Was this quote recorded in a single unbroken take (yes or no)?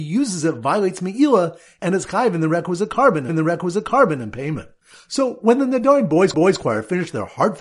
no